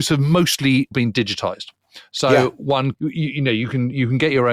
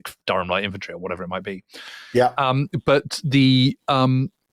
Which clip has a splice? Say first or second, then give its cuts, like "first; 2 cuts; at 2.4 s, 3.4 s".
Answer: first; 2 cuts; at 0.9 s, 2.9 s